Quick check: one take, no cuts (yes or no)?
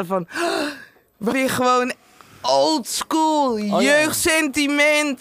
no